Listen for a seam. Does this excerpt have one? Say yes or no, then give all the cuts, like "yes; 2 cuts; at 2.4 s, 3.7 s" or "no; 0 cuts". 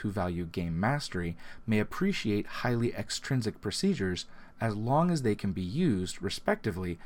no; 0 cuts